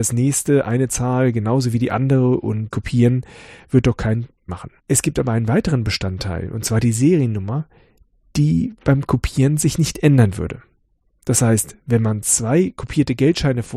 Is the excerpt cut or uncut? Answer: cut